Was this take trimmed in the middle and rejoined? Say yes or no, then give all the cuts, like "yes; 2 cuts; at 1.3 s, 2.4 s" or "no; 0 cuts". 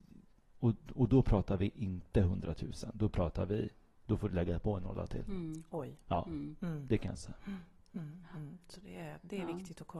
no; 0 cuts